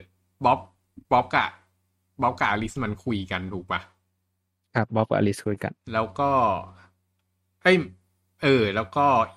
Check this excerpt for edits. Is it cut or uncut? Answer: cut